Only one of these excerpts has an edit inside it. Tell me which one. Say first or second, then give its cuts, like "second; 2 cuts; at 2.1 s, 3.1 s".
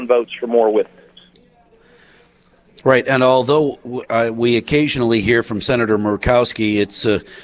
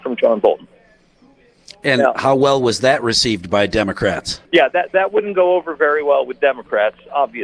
second; 1 cut; at 4.4 s